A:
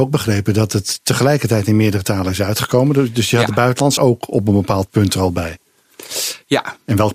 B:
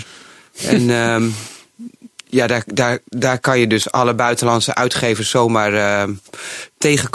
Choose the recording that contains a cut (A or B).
A